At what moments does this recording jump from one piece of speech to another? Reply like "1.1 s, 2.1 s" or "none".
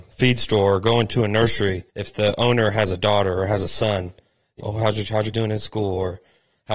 1.9 s, 4.6 s, 5.3 s